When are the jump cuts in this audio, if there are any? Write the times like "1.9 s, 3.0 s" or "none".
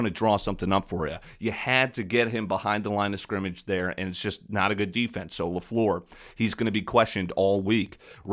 none